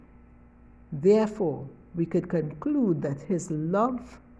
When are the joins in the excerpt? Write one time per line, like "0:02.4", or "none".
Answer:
none